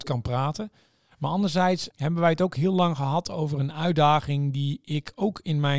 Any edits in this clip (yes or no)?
yes